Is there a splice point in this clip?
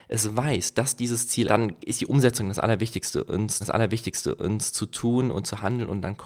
yes; 2 cuts; at 1.5 s, 3.6 s

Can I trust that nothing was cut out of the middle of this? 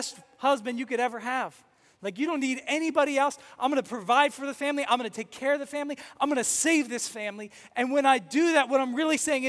yes; 0 cuts

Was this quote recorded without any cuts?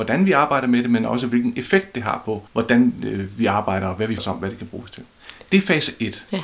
no; 2 cuts; at 2.5 s, 4.2 s

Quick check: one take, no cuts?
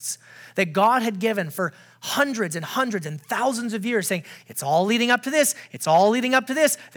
yes; 0 cuts

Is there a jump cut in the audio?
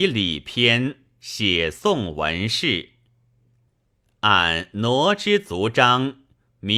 no; 0 cuts

